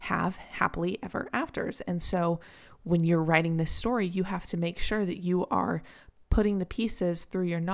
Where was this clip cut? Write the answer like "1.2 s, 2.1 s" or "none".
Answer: none